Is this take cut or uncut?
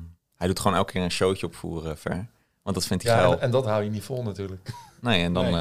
uncut